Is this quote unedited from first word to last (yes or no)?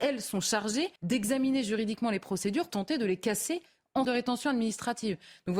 no